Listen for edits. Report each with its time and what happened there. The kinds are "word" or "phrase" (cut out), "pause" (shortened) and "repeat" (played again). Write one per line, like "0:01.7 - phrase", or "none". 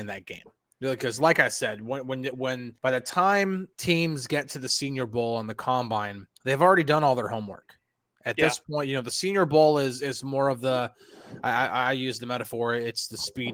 0:02.8 - pause
0:03.7 - pause
0:06.3 - pause